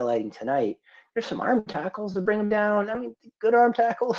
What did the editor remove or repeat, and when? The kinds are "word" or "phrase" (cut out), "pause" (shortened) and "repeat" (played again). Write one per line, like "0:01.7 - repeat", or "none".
none